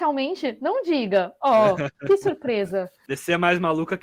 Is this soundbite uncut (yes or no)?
yes